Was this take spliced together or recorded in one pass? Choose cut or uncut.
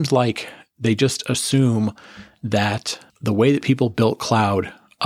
cut